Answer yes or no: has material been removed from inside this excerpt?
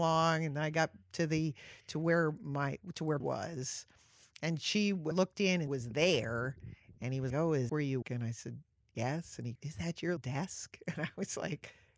yes